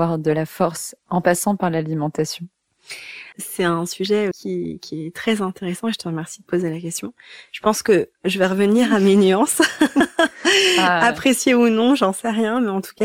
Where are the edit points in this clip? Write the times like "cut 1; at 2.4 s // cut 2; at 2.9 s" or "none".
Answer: cut 1; at 1.0 s // cut 2; at 3.3 s // cut 3; at 4.3 s